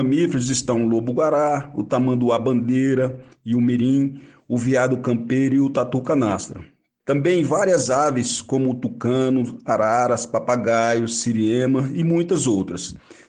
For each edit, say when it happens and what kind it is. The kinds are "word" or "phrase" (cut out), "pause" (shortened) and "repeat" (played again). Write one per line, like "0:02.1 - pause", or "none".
none